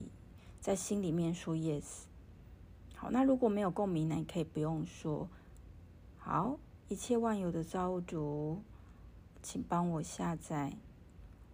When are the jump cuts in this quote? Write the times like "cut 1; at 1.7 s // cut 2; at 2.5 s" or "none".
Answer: cut 1; at 9.3 s